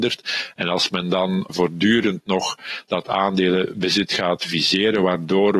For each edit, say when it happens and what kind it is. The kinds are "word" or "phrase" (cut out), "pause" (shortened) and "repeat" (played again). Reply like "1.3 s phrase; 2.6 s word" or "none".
1.5 s word